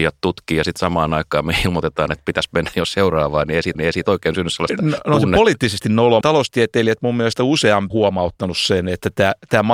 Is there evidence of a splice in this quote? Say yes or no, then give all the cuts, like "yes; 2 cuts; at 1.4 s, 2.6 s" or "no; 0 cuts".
yes; 3 cuts; at 3.7 s, 6.2 s, 7.9 s